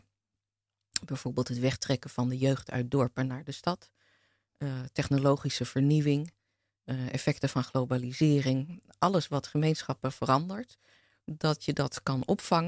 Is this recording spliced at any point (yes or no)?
no